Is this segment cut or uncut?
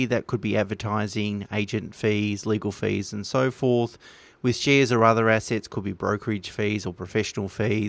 uncut